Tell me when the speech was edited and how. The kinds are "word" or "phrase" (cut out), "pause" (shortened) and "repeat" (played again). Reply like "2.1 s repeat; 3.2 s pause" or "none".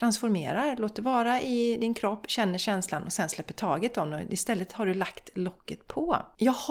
none